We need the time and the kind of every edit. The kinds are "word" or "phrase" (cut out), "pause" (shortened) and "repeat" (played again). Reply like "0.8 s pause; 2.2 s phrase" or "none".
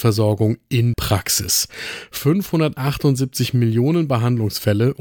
0.9 s word

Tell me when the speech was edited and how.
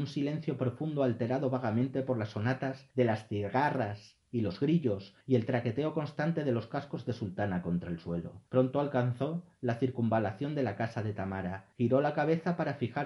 2.9 s pause; 5.2 s pause; 8.5 s pause; 11.7 s pause

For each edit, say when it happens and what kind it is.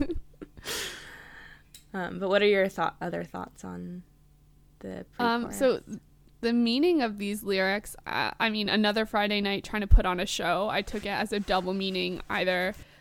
none

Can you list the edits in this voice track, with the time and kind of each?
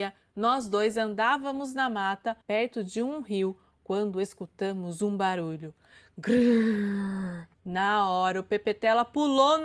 2.4 s pause; 7.5 s pause

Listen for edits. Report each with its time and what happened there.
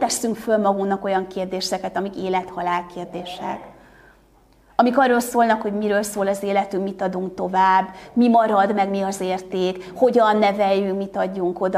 none

